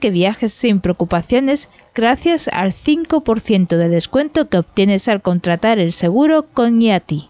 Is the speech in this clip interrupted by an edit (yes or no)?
no